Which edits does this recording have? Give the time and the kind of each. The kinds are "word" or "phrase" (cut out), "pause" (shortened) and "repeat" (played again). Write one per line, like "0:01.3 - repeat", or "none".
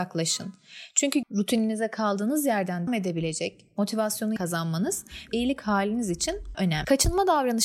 0:01.2 - word
0:02.9 - word
0:04.4 - word
0:05.3 - word
0:06.5 - word

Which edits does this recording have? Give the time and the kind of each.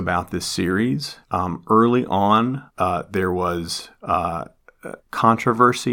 0:01.2 - pause
0:02.7 - pause
0:05.0 - pause

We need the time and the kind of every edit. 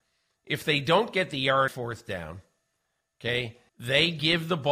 0:01.7 - word
0:03.7 - pause

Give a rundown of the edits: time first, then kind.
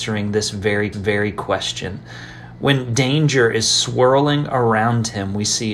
0:00.9 - repeat

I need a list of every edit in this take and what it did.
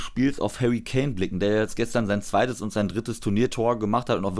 none

